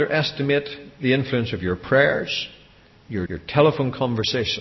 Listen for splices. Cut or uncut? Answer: cut